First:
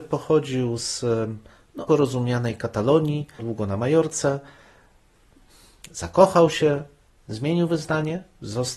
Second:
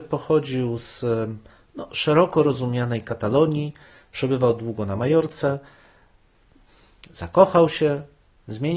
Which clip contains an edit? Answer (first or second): first